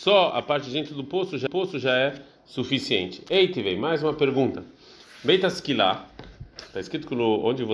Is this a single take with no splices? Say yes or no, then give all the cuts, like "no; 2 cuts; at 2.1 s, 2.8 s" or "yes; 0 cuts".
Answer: no; 1 cut; at 1.5 s